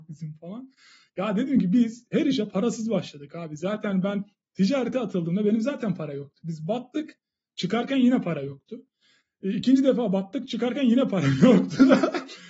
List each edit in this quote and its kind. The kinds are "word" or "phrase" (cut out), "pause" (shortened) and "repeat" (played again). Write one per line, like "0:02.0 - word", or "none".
none